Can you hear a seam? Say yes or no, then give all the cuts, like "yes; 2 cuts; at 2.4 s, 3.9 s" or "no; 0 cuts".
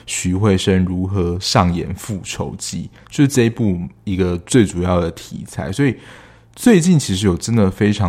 no; 0 cuts